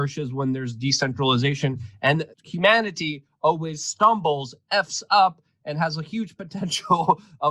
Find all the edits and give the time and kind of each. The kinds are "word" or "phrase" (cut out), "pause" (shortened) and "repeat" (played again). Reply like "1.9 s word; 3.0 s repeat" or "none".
2.3 s pause